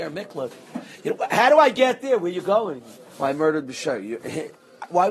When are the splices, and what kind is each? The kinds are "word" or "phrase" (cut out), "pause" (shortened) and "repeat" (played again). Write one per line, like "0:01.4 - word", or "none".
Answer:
none